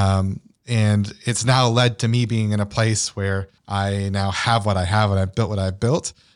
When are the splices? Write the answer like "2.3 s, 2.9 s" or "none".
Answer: 3.6 s